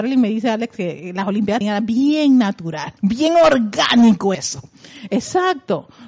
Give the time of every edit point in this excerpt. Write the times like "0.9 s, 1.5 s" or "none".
1.6 s, 3.0 s, 4.3 s